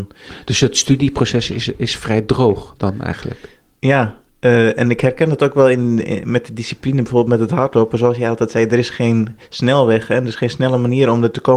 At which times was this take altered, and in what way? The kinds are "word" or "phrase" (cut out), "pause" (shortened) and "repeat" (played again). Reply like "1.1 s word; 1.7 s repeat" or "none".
none